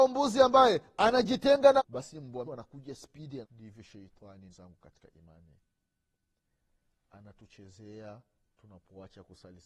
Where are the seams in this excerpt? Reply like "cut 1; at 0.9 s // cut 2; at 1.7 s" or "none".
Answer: cut 1; at 1.8 s // cut 2; at 2.5 s // cut 3; at 3.4 s // cut 4; at 4.5 s